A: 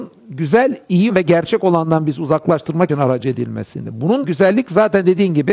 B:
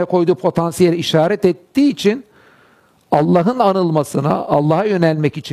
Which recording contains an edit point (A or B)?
A